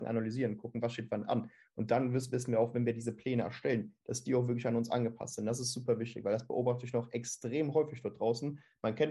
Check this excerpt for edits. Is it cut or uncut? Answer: uncut